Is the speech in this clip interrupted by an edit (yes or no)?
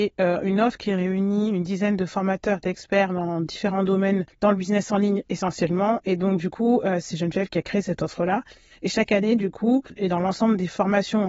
no